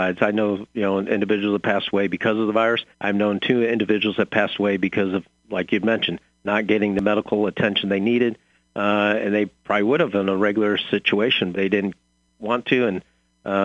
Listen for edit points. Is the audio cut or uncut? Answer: cut